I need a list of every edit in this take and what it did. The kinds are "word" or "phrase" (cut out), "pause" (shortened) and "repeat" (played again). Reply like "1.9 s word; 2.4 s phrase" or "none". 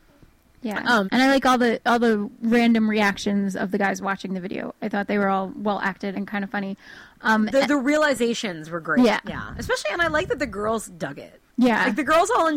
1.0 s word; 6.1 s word; 11.5 s pause